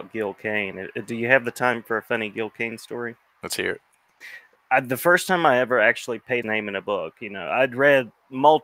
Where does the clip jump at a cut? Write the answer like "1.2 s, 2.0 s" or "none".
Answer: 6.4 s

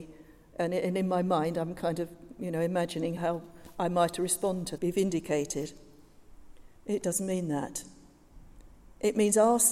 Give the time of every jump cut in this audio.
3.2 s, 4.8 s, 6.8 s

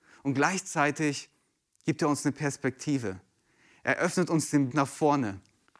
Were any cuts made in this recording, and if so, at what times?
4.7 s

